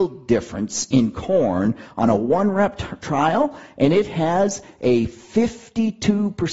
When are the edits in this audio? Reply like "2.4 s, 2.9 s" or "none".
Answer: none

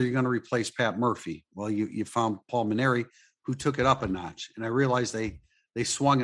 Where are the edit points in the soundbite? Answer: none

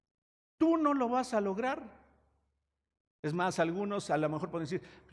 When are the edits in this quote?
none

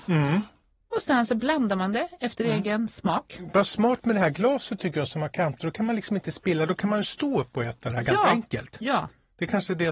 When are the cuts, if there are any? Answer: none

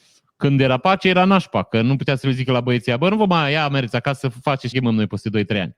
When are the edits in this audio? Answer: 4.7 s

